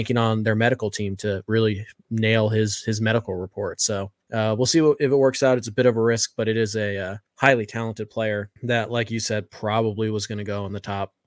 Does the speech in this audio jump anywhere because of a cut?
yes; 3 cuts; at 4.2 s, 7.3 s, 8.6 s

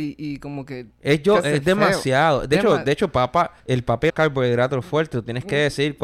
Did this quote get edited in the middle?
yes; 2 cuts; at 3.6 s, 4.1 s

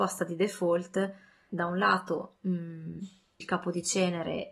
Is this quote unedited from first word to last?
no; 2 cuts; at 1.5 s, 3.4 s

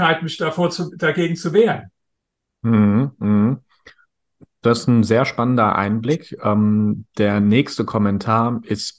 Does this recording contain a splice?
no; 0 cuts

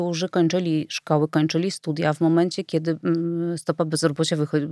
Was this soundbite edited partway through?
no; 0 cuts

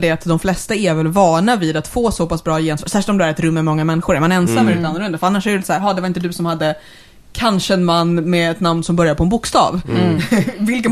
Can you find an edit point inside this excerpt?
no; 0 cuts

